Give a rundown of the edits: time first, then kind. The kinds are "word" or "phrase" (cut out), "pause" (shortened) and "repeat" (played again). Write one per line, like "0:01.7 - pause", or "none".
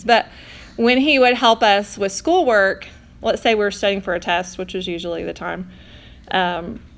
none